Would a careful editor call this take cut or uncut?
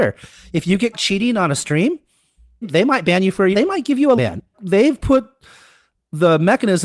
cut